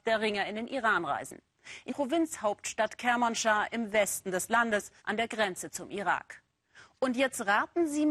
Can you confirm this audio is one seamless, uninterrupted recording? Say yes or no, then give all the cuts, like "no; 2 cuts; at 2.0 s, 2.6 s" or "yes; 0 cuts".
no; 2 cuts; at 1.9 s, 5.0 s